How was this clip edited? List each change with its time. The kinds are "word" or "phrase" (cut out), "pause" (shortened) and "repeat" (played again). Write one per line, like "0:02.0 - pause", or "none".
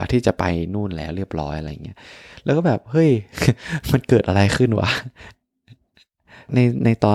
none